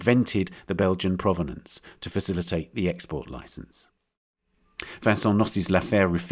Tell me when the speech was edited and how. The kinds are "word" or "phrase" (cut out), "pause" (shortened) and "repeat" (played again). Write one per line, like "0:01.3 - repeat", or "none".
none

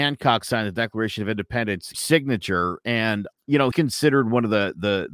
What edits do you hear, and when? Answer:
0:01.9 - word
0:03.3 - word
0:03.7 - word

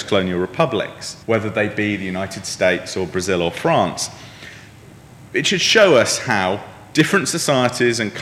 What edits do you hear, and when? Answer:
0:01.2 - pause

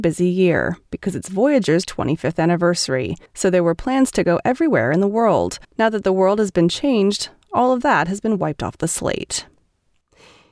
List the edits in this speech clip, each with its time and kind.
0:03.3 - pause
0:05.6 - pause

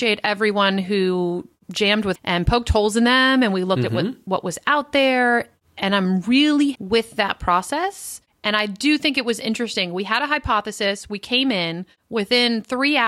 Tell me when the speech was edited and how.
0:01.6 - word
0:02.1 - phrase
0:06.7 - word

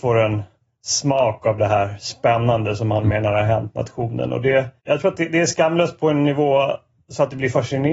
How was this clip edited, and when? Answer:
0:04.8 - pause

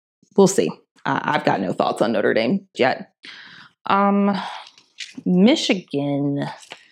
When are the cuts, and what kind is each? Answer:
0:02.7 - word

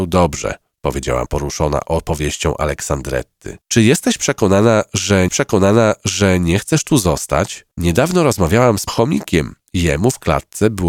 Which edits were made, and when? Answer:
0:01.3 - word
0:03.6 - pause
0:05.3 - repeat
0:07.7 - pause
0:08.9 - word

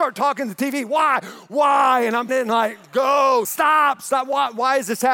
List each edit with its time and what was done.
0:02.3 - word
0:03.4 - word

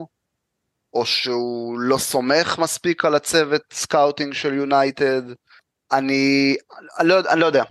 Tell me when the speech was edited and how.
none

